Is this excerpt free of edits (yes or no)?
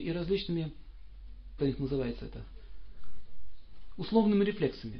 no